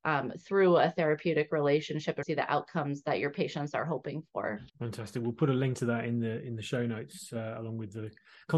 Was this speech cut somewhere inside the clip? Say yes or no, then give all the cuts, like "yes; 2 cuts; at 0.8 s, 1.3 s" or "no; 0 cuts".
yes; 2 cuts; at 2.2 s, 4.7 s